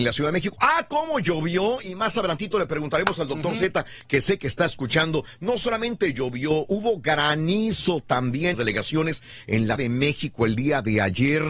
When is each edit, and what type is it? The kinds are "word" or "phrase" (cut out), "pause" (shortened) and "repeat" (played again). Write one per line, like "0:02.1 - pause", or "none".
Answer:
0:08.5 - phrase
0:09.8 - word